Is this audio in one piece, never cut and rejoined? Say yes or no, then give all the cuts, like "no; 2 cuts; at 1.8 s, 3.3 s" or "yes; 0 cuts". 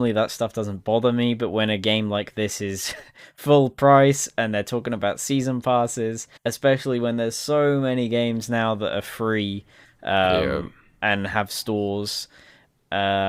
no; 1 cut; at 6.4 s